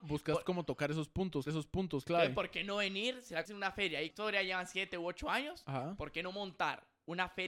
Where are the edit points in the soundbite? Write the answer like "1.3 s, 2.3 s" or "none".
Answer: 1.5 s, 3.5 s, 4.1 s